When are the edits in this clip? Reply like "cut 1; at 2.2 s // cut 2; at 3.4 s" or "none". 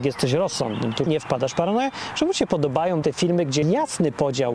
cut 1; at 1.1 s // cut 2; at 3.0 s // cut 3; at 3.6 s